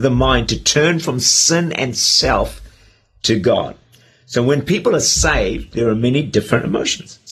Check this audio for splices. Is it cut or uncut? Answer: uncut